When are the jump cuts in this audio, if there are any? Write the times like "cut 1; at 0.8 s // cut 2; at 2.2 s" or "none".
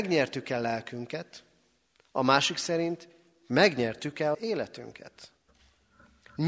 cut 1; at 4.3 s